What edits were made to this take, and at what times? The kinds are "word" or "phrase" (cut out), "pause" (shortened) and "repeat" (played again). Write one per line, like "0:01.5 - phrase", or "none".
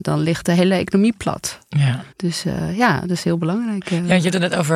0:02.1 - pause